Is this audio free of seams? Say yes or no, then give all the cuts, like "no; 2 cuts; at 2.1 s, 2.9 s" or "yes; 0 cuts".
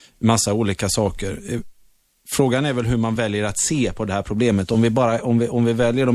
yes; 0 cuts